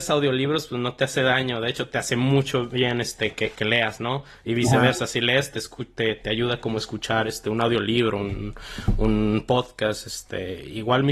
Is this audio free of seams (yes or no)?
yes